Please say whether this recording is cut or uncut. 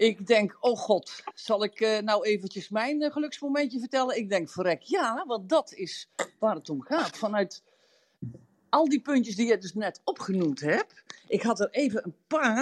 uncut